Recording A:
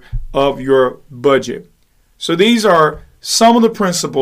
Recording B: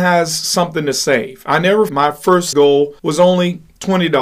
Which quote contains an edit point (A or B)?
B